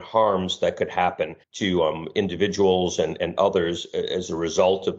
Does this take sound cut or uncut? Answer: cut